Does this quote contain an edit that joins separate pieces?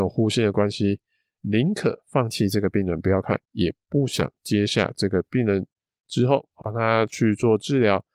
yes; 2 cuts; at 3.4 s, 6.6 s

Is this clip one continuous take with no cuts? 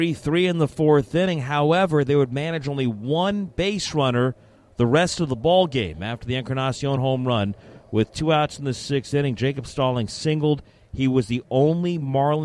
yes; 0 cuts

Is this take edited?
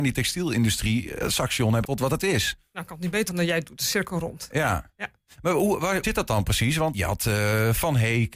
yes; 5 cuts; at 1.2 s, 1.8 s, 3.3 s, 6.0 s, 6.9 s

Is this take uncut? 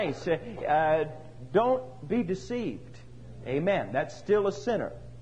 yes; 0 cuts

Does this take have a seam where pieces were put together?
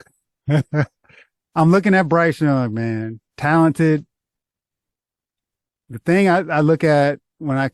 no; 0 cuts

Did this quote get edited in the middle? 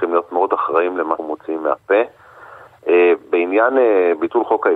yes; 1 cut; at 1.2 s

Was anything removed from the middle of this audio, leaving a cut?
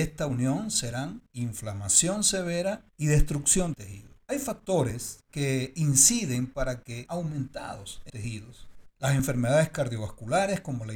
yes; 6 cuts; at 2.9 s, 3.7 s, 4.2 s, 7.1 s, 8.1 s, 8.9 s

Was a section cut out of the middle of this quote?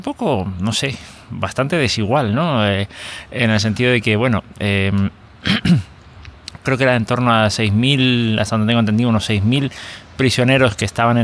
no; 0 cuts

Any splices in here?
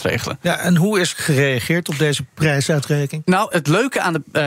yes; 2 cuts; at 1.1 s, 3.5 s

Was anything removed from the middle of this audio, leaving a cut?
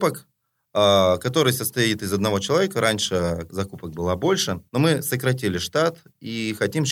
yes; 2 cuts; at 3.5 s, 4.7 s

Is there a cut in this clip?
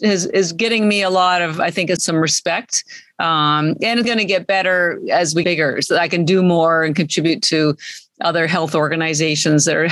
yes; 3 cuts; at 2.0 s, 4.0 s, 5.4 s

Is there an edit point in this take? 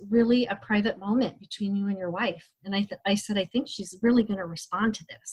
no; 0 cuts

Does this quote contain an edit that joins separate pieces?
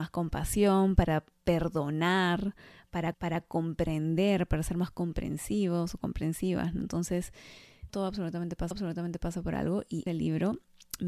yes; 4 cuts; at 3.1 s, 7.9 s, 8.7 s, 10.1 s

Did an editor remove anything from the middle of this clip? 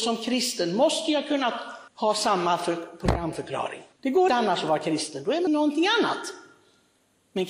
yes; 4 cuts; at 1.9 s, 3.9 s, 4.3 s, 5.5 s

